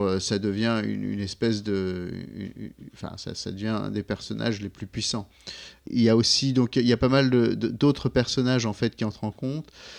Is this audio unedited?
yes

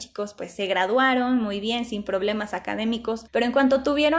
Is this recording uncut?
yes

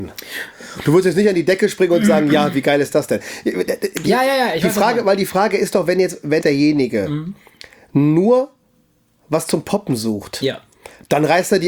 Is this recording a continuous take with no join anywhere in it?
no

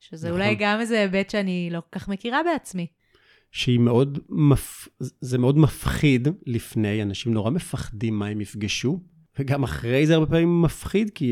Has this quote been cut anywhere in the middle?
no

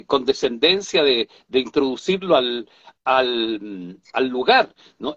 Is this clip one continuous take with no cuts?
yes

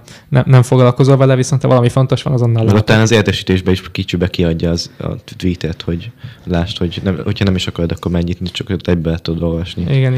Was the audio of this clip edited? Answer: no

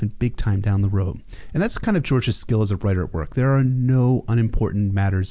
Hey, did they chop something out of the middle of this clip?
no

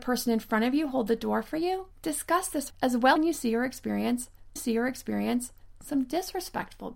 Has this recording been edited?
yes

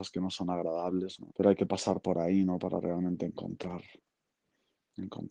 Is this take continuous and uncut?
no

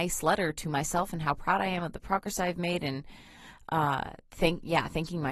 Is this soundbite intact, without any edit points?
yes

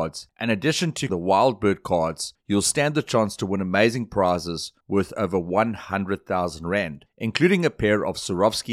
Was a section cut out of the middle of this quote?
yes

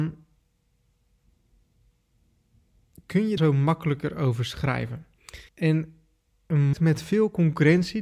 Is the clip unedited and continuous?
no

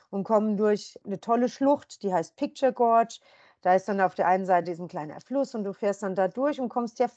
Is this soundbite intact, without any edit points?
yes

